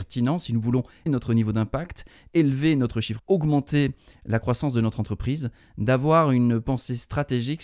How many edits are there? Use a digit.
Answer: 2